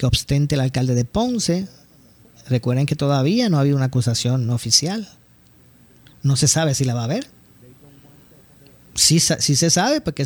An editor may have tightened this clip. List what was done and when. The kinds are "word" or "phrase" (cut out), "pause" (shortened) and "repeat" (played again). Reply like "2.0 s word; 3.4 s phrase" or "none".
none